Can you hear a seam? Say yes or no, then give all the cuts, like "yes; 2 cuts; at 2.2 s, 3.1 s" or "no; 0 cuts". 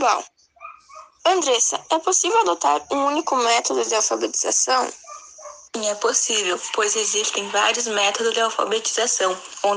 no; 0 cuts